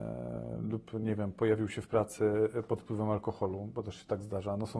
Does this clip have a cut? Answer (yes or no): no